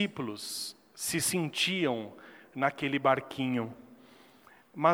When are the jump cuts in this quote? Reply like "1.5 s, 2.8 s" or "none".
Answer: none